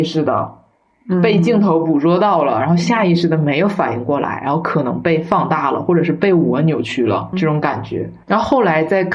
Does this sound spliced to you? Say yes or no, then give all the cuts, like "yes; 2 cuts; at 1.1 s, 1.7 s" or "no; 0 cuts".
yes; 2 cuts; at 7.3 s, 8.2 s